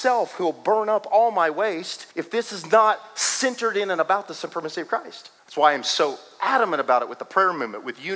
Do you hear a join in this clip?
yes; 2 cuts; at 2.1 s, 5.4 s

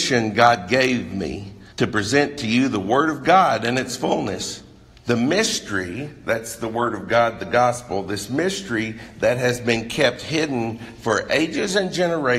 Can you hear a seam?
yes; 2 cuts; at 1.7 s, 4.9 s

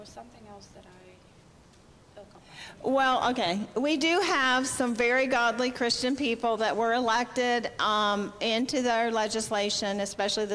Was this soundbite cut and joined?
no; 0 cuts

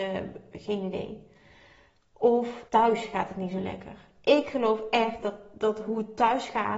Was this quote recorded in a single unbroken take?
no; 1 cut; at 2.7 s

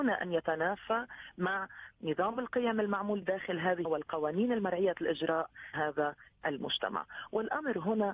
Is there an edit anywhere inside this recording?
yes; 3 cuts; at 3.2 s, 3.8 s, 5.7 s

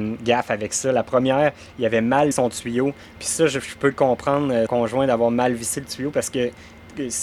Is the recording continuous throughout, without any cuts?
no; 2 cuts; at 2.3 s, 4.7 s

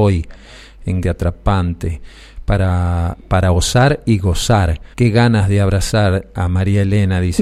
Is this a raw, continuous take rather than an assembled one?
no; 2 cuts; at 1.0 s, 4.9 s

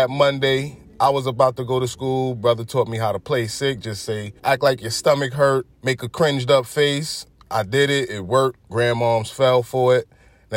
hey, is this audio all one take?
no; 3 cuts; at 4.4 s, 5.7 s, 8.6 s

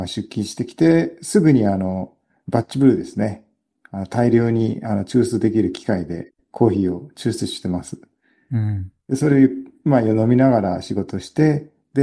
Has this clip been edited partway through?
no; 0 cuts

